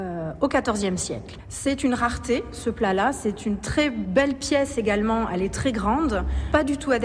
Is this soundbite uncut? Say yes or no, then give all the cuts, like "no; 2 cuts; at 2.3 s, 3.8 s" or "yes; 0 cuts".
yes; 0 cuts